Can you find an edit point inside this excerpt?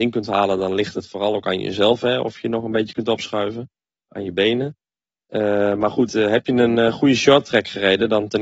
no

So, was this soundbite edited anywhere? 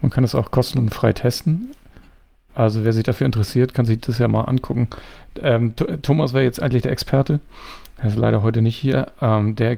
no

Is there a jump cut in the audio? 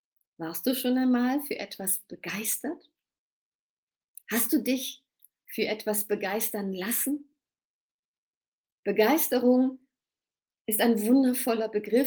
no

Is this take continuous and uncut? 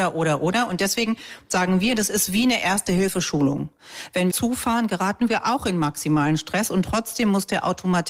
no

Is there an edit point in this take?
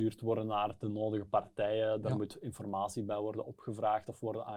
no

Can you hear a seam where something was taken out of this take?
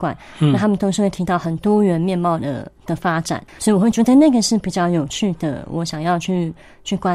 yes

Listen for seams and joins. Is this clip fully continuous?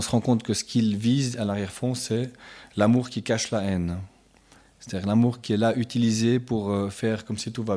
yes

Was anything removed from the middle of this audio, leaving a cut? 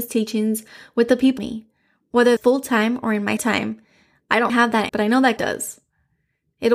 yes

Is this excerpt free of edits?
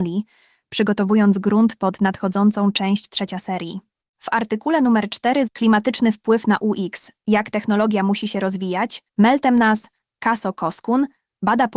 no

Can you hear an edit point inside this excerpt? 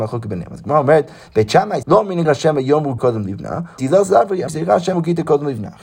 yes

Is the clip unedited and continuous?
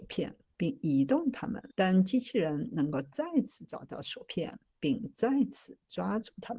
no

